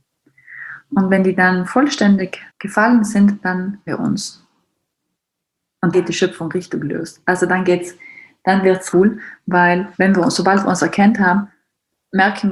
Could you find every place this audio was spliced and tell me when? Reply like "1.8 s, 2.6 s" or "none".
2.5 s, 3.9 s, 5.9 s, 8.9 s, 9.9 s